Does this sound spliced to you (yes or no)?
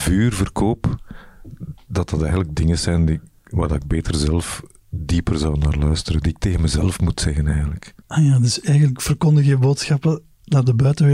yes